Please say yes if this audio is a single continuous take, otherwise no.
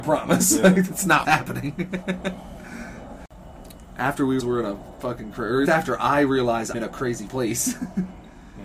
no